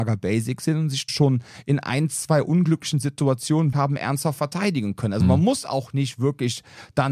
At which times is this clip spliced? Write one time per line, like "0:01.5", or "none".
0:01.1
0:03.7